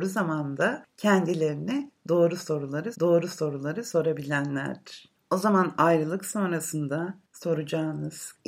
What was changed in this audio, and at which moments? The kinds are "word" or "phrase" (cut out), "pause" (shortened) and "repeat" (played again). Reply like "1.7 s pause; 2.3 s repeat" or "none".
2.9 s repeat